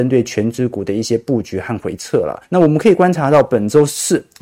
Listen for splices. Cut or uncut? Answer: cut